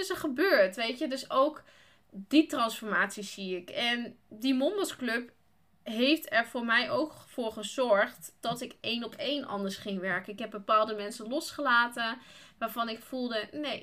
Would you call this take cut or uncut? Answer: uncut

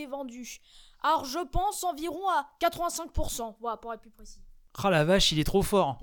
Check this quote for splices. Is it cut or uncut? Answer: uncut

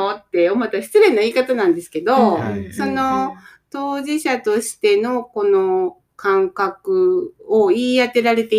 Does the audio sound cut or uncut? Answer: uncut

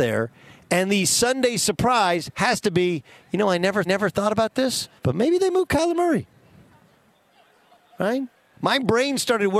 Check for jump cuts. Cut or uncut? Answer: cut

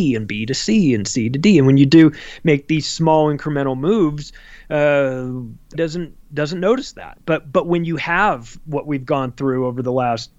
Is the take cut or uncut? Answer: cut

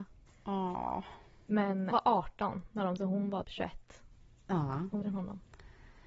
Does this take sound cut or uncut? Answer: cut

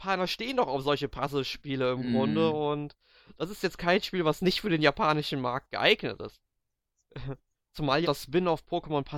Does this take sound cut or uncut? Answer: cut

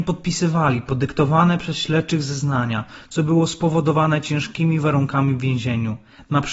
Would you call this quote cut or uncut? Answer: uncut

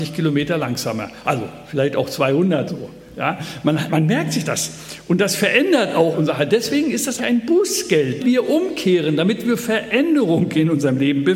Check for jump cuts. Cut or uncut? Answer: cut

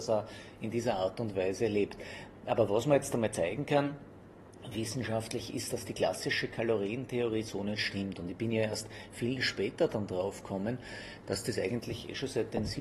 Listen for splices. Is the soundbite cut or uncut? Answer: uncut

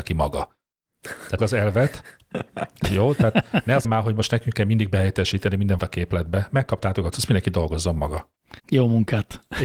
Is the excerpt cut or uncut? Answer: cut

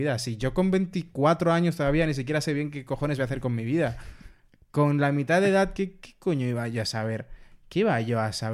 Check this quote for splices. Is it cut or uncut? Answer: uncut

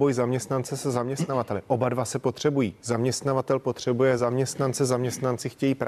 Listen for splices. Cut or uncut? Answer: uncut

